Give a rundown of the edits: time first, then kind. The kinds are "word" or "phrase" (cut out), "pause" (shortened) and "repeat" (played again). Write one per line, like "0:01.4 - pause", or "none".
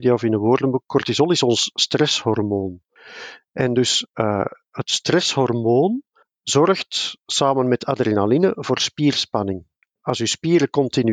none